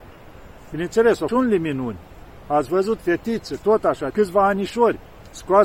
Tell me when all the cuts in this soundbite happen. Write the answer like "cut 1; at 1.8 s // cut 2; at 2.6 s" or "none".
cut 1; at 1.3 s // cut 2; at 3.0 s // cut 3; at 4.1 s